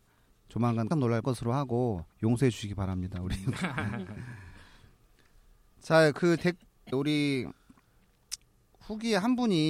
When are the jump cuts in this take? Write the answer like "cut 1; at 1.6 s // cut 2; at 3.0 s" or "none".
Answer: cut 1; at 0.9 s // cut 2; at 1.2 s // cut 3; at 2.1 s // cut 4; at 6.4 s // cut 5; at 6.9 s